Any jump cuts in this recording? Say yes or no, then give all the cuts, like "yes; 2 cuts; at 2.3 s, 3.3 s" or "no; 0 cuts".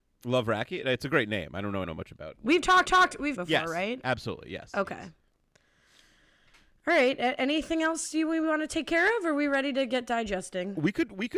yes; 3 cuts; at 1.8 s, 2.9 s, 3.4 s